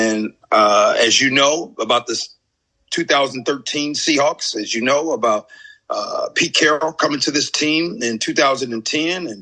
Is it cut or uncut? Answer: uncut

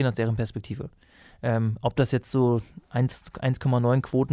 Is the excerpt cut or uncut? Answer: uncut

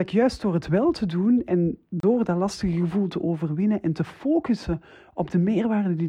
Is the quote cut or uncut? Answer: uncut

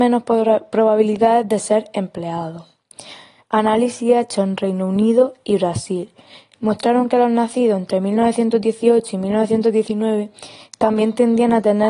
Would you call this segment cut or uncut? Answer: uncut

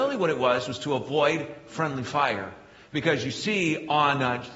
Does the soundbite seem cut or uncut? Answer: uncut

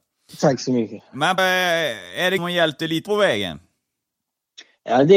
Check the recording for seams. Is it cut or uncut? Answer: cut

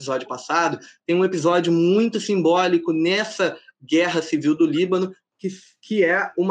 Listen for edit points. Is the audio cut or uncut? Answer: uncut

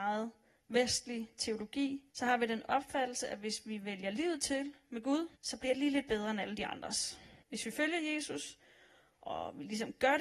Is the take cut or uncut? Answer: cut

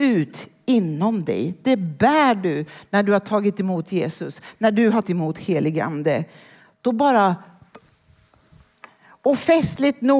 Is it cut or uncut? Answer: cut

